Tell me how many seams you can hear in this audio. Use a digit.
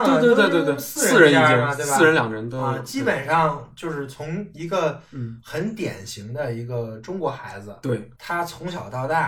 1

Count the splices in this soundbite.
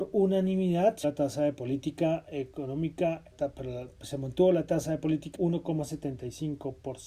3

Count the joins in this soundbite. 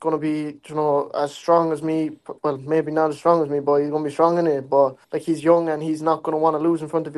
2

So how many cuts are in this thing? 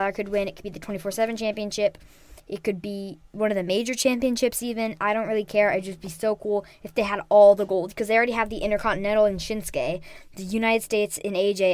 1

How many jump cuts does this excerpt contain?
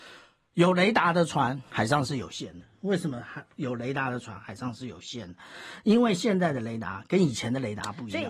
1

